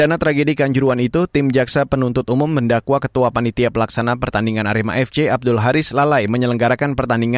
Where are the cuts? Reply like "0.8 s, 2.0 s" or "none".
none

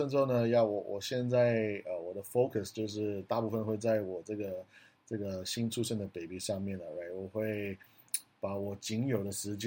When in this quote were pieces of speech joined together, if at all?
none

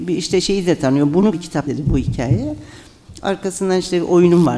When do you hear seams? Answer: 1.3 s, 1.7 s

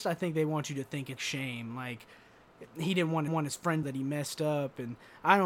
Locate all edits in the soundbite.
1.2 s, 3.3 s, 3.8 s

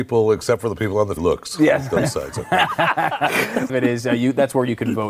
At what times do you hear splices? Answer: 1.2 s, 3.7 s

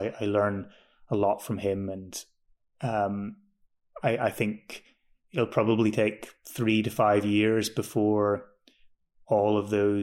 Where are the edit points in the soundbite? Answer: none

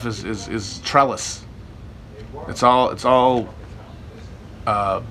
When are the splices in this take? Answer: none

